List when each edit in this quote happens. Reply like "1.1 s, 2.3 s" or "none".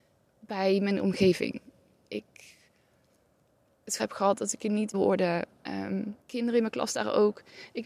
4.0 s, 4.9 s, 6.2 s